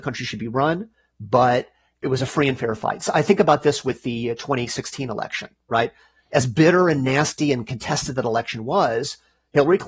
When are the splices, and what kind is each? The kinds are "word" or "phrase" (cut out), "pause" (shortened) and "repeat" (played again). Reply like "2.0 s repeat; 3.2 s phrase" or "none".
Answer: none